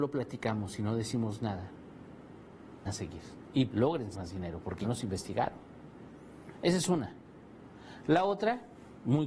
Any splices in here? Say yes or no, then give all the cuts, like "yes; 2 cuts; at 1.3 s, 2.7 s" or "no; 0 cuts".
yes; 4 cuts; at 2.9 s, 3.7 s, 4.1 s, 4.8 s